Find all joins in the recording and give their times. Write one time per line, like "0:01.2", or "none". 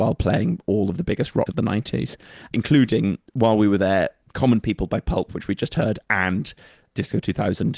0:01.5